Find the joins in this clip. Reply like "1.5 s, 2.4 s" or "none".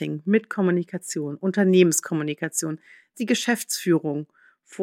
3.1 s